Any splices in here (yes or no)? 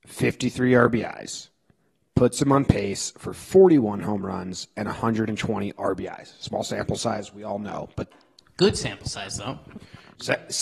no